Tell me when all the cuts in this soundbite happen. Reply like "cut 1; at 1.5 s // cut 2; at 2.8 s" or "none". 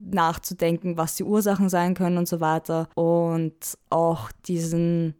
cut 1; at 2.9 s